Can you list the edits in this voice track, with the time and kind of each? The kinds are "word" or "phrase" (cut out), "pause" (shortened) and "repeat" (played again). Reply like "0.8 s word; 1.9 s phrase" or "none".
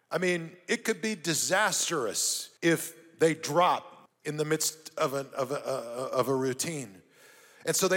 2.6 s pause; 4.1 s pause